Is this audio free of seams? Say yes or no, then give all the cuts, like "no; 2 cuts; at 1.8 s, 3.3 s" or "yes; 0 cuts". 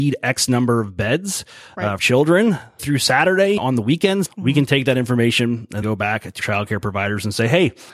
no; 6 cuts; at 2.0 s, 2.8 s, 3.6 s, 4.3 s, 5.8 s, 6.4 s